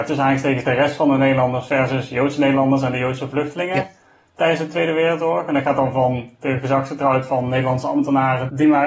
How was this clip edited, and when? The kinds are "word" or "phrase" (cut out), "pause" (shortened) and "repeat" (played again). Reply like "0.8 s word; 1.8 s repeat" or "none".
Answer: none